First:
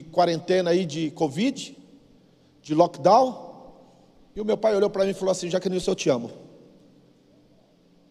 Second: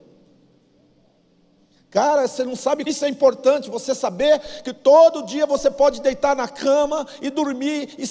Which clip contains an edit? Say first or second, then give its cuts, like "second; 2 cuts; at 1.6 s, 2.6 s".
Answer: second; 1 cut; at 2.9 s